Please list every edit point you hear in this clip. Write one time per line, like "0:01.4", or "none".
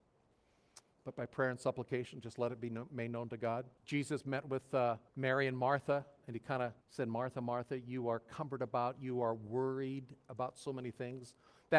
0:03.8
0:05.1
0:06.8